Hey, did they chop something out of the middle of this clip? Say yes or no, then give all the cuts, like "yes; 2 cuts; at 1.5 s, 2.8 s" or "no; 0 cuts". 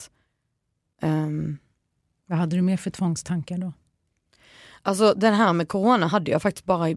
no; 0 cuts